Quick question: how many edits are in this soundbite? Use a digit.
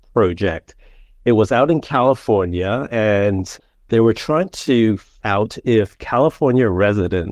1